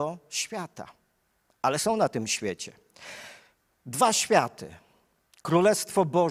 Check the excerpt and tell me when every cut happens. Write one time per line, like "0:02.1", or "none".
none